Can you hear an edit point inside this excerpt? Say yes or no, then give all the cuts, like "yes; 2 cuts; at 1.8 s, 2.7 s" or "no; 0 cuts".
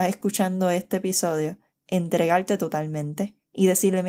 no; 0 cuts